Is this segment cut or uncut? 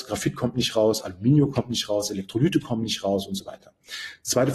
uncut